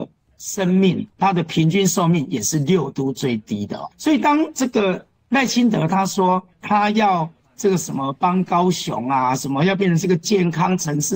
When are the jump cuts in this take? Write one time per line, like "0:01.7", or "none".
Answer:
0:01.1
0:03.9
0:06.5